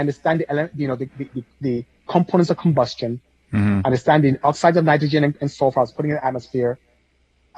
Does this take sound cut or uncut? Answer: cut